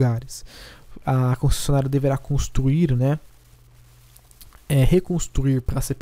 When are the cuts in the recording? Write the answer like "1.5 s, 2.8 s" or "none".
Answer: none